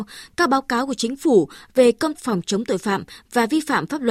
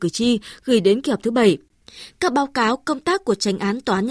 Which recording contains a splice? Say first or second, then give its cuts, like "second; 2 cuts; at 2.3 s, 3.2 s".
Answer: first; 1 cut; at 2.1 s